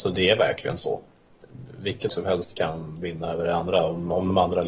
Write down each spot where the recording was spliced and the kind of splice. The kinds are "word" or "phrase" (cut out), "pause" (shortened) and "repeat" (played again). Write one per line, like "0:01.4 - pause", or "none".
0:02.1 - word